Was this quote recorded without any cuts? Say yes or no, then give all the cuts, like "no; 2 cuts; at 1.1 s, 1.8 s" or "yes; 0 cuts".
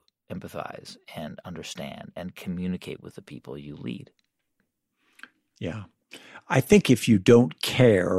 yes; 0 cuts